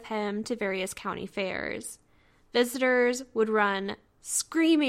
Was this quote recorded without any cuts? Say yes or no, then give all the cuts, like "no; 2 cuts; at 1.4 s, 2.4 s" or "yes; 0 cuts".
yes; 0 cuts